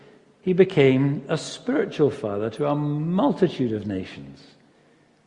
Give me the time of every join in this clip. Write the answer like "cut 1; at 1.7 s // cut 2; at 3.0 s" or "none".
none